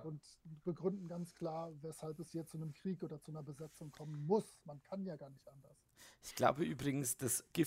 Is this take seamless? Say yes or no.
yes